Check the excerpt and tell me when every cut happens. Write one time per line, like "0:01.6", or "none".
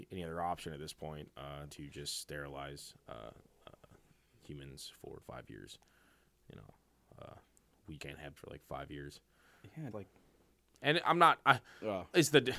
0:01.7
0:05.2
0:08.0
0:08.4
0:09.9